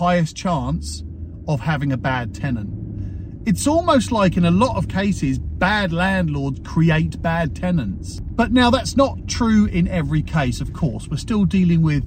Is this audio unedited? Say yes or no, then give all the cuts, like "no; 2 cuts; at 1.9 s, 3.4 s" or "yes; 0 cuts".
yes; 0 cuts